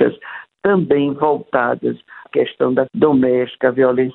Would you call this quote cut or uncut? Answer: cut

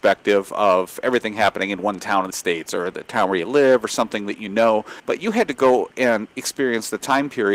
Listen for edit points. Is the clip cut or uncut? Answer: cut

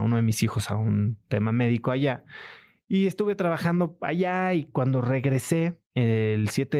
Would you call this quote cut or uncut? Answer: uncut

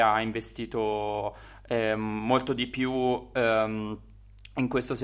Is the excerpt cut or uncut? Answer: uncut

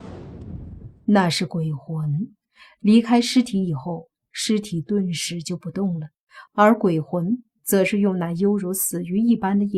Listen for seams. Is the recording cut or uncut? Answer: uncut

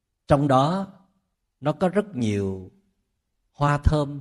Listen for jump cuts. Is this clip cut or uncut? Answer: cut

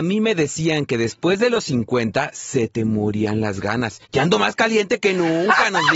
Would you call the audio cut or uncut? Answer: cut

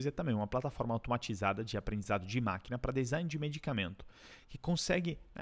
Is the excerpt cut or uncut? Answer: uncut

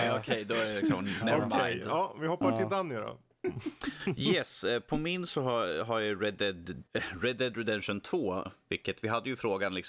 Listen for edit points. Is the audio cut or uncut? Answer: cut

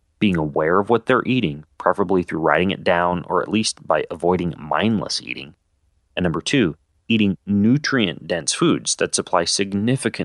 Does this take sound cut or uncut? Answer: uncut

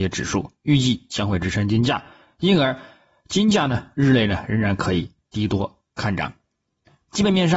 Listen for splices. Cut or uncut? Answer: uncut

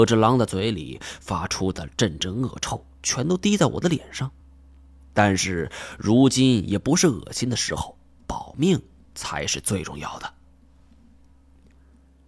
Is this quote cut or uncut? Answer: uncut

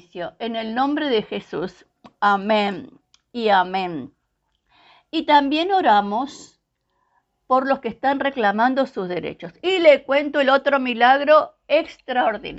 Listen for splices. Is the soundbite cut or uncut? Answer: uncut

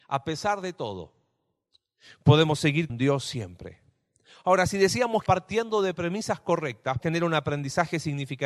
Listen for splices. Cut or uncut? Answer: cut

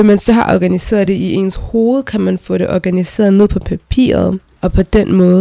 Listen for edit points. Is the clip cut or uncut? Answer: uncut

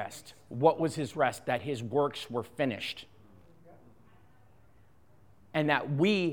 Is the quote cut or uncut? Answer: uncut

